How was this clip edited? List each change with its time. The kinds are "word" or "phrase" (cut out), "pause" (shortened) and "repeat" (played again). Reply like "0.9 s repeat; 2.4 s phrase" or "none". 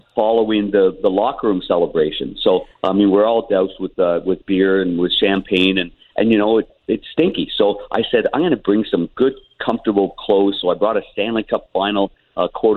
2.7 s pause